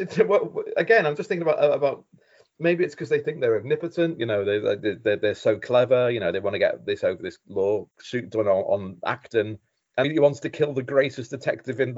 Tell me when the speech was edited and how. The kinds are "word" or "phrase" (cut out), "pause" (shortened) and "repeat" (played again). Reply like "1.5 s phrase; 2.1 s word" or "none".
7.9 s pause; 10.0 s word